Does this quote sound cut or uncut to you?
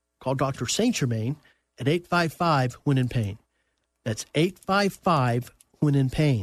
uncut